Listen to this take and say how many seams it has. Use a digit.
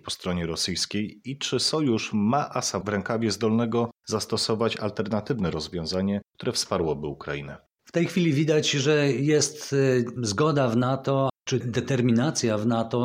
1